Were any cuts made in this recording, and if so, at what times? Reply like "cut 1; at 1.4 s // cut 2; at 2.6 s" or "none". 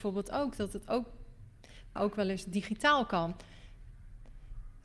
cut 1; at 2.0 s